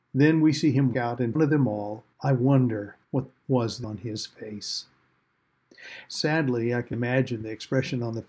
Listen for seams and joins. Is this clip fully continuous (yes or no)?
no